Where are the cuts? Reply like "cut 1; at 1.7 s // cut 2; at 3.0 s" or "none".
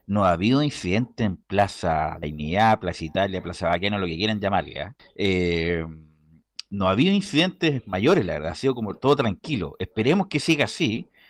cut 1; at 2.2 s // cut 2; at 5.0 s